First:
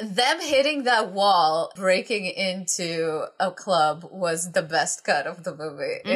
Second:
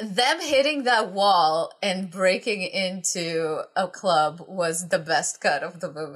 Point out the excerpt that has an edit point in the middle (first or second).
first